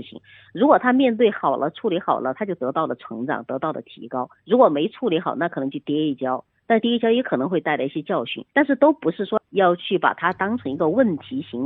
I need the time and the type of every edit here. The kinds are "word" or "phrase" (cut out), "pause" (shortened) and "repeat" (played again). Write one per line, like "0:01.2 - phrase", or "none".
0:04.4 - pause
0:08.5 - pause